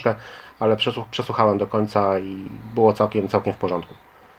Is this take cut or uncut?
uncut